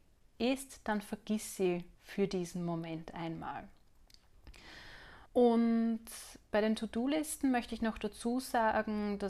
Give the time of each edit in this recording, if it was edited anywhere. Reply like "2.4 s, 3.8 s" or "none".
1.9 s, 5.3 s